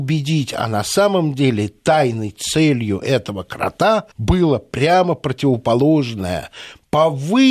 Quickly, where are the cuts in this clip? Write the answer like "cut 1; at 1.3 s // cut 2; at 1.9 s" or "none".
cut 1; at 4.1 s